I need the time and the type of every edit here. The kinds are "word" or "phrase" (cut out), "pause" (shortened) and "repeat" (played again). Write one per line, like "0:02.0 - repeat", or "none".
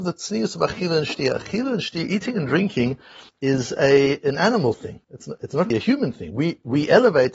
0:03.3 - pause
0:05.0 - pause
0:05.7 - word